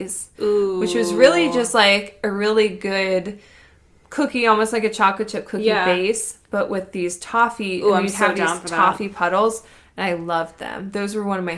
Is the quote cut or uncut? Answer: uncut